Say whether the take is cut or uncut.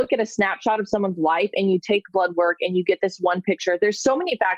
uncut